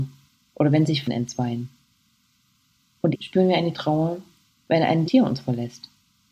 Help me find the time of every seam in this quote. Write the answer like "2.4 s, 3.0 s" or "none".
1.1 s, 3.1 s, 3.7 s, 5.1 s